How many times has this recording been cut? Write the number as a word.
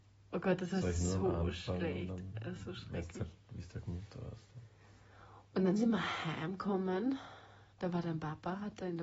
one